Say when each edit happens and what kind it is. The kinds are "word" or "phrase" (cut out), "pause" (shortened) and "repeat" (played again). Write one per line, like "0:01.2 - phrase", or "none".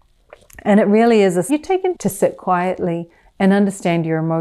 0:01.5 - phrase
0:01.9 - word